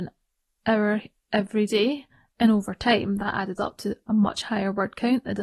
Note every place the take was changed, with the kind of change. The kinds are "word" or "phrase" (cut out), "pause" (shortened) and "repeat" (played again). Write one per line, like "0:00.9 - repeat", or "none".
none